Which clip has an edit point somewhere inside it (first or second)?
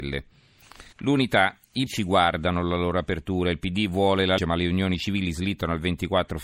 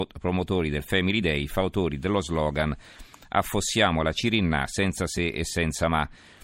first